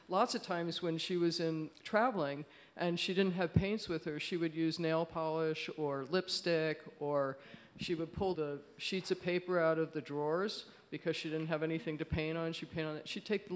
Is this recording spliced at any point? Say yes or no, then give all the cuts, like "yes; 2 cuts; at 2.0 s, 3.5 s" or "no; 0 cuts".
yes; 1 cut; at 8.3 s